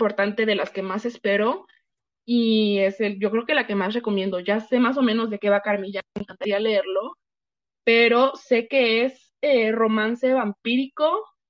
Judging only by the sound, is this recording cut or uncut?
uncut